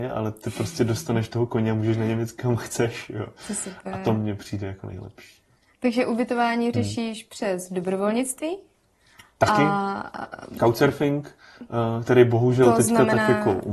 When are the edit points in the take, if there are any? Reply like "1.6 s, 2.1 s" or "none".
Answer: none